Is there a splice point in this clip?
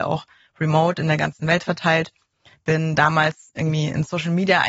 no; 0 cuts

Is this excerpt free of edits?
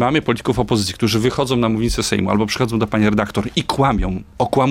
yes; 0 cuts

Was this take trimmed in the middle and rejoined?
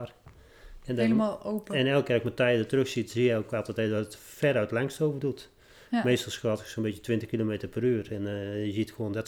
no; 0 cuts

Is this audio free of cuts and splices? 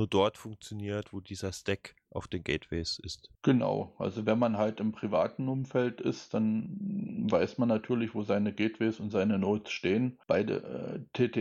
no; 2 cuts; at 3.3 s, 10.2 s

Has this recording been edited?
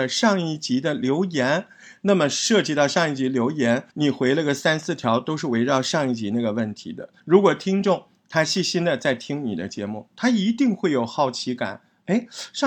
yes; 2 cuts; at 3.9 s, 7.2 s

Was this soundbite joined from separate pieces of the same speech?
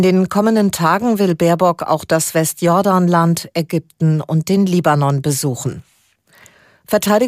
no; 0 cuts

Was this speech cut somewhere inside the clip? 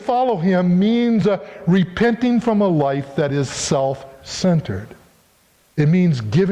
no; 0 cuts

